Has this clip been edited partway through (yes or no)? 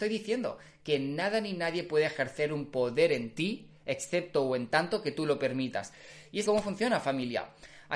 yes